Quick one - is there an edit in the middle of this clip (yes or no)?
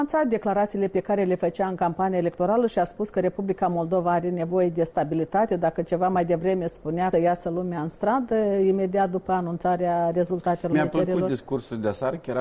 yes